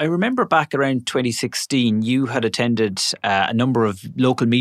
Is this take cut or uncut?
uncut